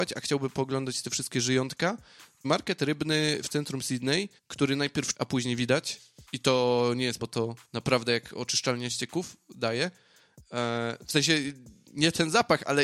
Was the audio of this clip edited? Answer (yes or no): yes